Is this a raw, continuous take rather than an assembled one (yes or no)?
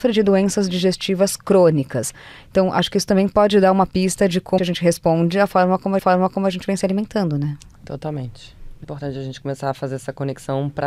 no